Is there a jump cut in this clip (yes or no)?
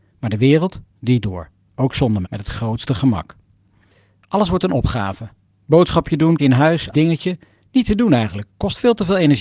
yes